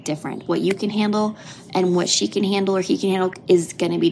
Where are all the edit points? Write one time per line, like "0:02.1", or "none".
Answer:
none